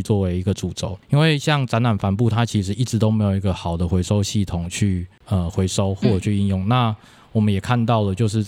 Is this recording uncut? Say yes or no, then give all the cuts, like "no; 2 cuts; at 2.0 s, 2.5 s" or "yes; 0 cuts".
yes; 0 cuts